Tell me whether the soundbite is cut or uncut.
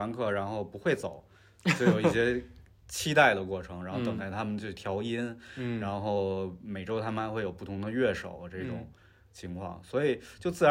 uncut